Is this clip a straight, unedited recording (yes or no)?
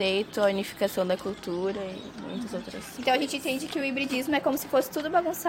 yes